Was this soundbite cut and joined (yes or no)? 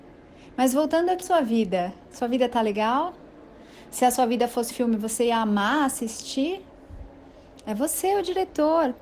yes